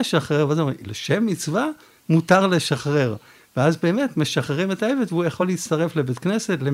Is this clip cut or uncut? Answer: uncut